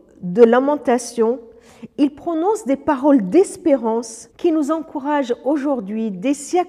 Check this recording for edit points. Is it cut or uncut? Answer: cut